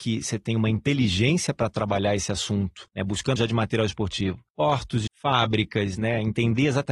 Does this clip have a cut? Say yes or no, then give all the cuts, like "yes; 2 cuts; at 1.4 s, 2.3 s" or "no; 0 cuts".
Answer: yes; 4 cuts; at 2.9 s, 3.4 s, 4.5 s, 5.1 s